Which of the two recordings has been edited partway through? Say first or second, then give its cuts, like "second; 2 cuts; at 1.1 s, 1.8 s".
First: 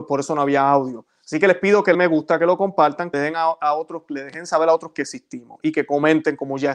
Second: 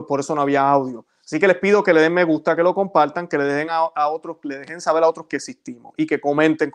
first; 2 cuts; at 1.9 s, 3.1 s